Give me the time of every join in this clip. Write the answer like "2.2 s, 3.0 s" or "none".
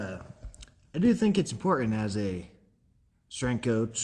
none